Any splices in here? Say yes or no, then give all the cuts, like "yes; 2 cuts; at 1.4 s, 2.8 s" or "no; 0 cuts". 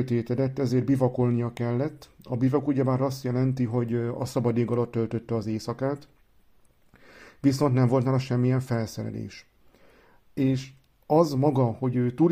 no; 0 cuts